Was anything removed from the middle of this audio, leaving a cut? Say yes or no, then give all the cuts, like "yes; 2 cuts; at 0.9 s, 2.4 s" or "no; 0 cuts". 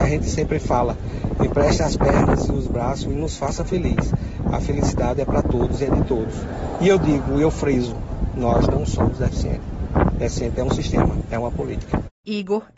no; 0 cuts